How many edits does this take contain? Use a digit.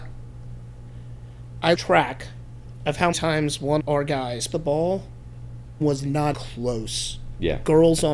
6